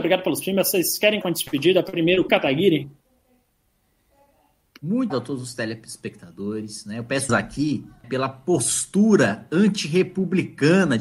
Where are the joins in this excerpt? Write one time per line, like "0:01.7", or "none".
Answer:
0:01.2
0:02.3
0:05.1
0:07.3
0:08.0